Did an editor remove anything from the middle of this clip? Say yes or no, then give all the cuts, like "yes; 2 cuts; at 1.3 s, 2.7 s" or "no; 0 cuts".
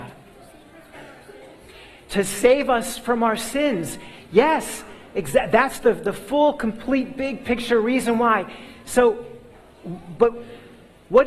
no; 0 cuts